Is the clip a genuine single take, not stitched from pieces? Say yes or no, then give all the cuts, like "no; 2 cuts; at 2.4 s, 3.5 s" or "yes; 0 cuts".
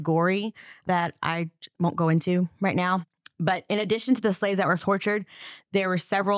no; 1 cut; at 4.8 s